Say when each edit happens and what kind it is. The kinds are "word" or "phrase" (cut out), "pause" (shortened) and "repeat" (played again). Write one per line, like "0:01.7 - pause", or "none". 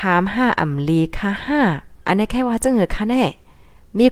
0:02.0 - pause